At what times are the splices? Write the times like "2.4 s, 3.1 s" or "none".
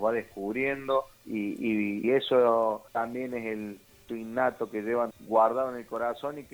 1.1 s, 2.0 s, 2.9 s, 4.1 s, 5.1 s